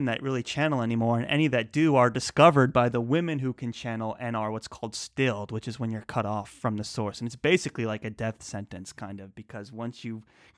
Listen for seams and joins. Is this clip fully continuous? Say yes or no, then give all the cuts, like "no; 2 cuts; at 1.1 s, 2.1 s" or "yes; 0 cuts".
yes; 0 cuts